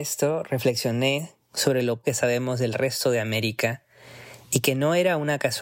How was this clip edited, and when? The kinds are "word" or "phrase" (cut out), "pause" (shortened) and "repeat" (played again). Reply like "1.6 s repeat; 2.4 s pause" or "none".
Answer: 2.0 s word